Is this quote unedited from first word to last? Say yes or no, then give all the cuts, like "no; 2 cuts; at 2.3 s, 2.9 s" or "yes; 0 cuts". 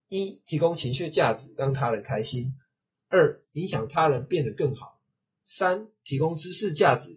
yes; 0 cuts